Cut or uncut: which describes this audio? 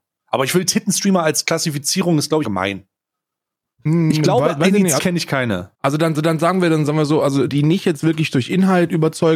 cut